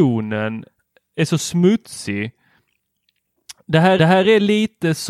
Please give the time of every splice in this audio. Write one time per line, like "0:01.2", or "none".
0:04.0